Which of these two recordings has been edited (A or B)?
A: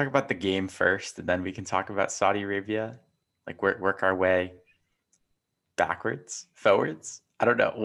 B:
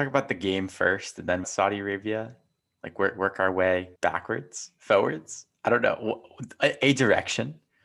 B